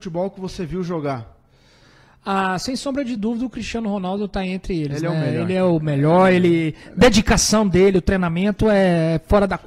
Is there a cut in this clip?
no; 0 cuts

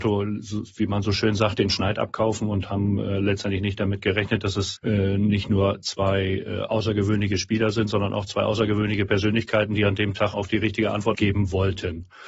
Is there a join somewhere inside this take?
yes; 3 cuts; at 4.8 s, 10.3 s, 11.1 s

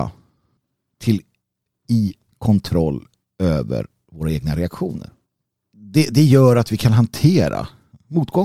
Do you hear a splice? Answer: no; 0 cuts

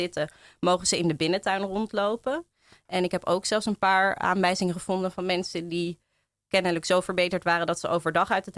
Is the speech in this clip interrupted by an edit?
no; 0 cuts

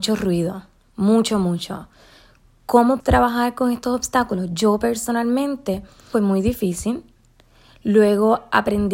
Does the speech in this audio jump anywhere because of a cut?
yes; 2 cuts; at 3.0 s, 6.1 s

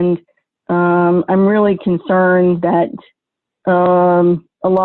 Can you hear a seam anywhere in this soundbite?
no; 0 cuts

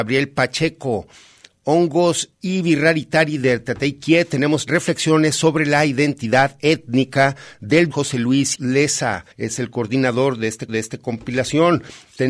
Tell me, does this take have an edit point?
yes; 6 cuts; at 2.3 s, 4.7 s, 7.9 s, 8.5 s, 9.3 s, 10.7 s

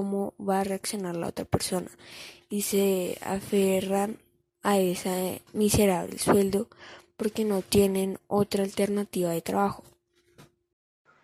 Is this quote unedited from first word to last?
yes; 0 cuts

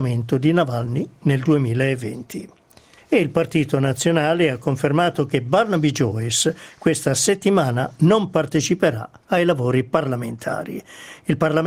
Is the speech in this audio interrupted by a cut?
yes; 1 cut; at 3.0 s

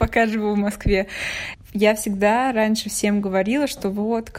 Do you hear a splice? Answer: no; 0 cuts

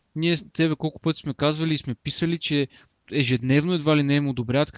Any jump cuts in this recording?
yes; 1 cut; at 3.0 s

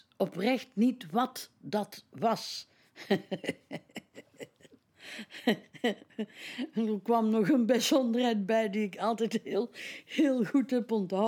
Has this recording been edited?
no; 0 cuts

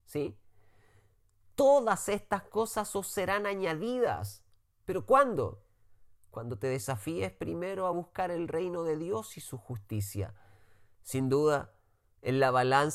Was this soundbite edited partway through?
no; 0 cuts

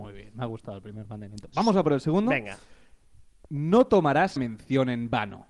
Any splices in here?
yes; 1 cut; at 4.4 s

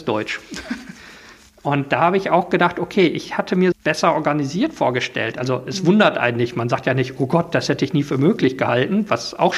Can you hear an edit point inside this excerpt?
yes; 1 cut; at 3.7 s

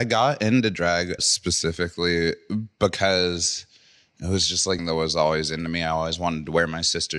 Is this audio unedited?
no; 2 cuts; at 1.2 s, 4.8 s

